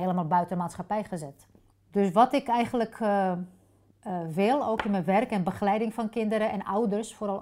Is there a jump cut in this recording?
yes; 1 cut; at 1.7 s

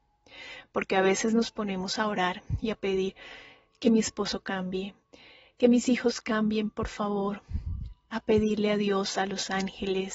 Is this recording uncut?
yes; 0 cuts

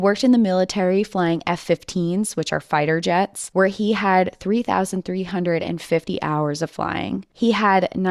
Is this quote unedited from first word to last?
yes; 0 cuts

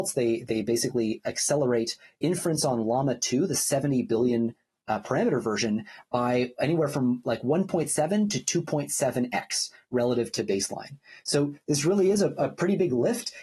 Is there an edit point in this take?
no; 0 cuts

